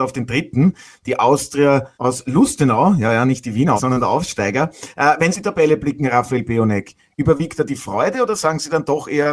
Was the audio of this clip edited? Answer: yes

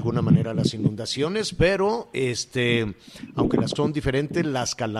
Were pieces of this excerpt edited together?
yes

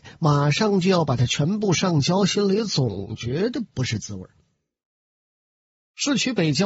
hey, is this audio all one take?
yes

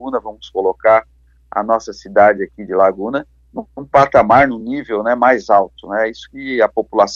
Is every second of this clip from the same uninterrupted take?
yes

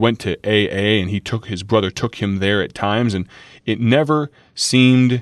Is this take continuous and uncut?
yes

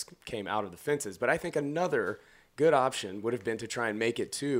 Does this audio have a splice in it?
no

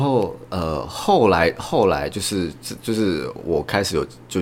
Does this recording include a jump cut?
no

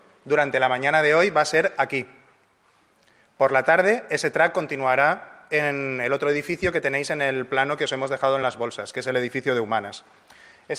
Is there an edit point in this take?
no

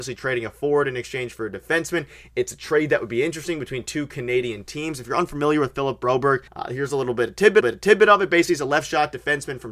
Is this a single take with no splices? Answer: no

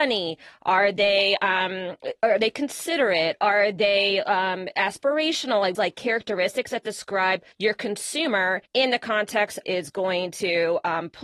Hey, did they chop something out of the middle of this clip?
yes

